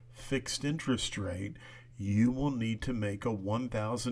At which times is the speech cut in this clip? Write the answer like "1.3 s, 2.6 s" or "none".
none